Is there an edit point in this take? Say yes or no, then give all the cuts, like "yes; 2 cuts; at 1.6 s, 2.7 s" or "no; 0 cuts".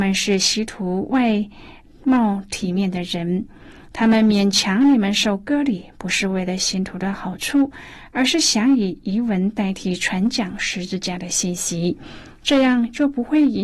no; 0 cuts